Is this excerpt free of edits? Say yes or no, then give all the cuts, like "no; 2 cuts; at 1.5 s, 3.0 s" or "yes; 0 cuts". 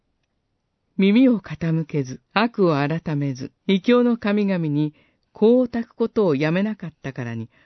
no; 2 cuts; at 2.2 s, 3.6 s